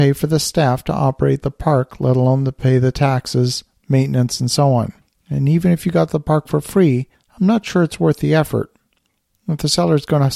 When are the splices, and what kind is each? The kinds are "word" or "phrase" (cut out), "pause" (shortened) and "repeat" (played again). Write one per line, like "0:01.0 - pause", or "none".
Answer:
0:05.0 - pause
0:07.1 - pause